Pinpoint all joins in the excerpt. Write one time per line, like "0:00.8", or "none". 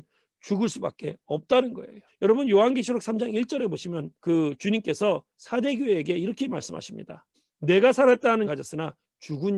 0:02.1
0:04.2
0:07.3
0:08.4